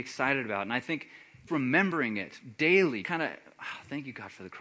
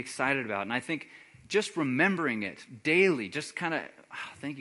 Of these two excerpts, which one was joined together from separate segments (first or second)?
first